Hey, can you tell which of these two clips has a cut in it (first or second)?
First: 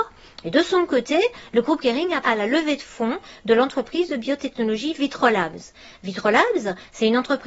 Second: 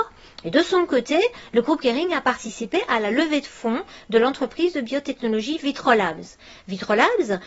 first